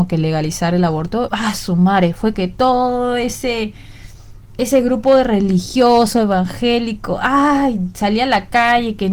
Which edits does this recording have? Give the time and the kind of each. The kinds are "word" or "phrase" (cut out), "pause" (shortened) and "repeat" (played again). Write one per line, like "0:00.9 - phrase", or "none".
0:01.3 - word
0:02.3 - word